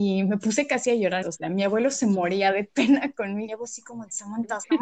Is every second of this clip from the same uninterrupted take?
no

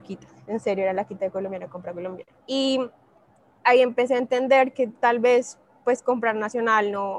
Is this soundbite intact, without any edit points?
no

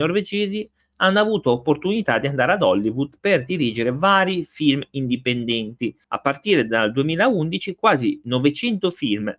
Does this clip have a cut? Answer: yes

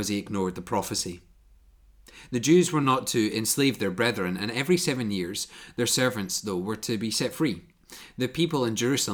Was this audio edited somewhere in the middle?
no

